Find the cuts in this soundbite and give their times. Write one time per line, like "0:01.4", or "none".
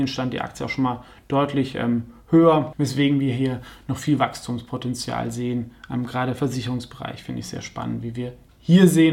none